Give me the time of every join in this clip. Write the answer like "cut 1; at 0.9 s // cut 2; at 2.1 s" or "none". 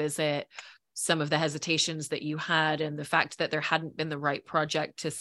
none